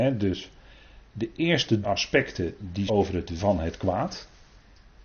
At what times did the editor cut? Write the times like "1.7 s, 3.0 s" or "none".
1.8 s, 2.9 s, 3.4 s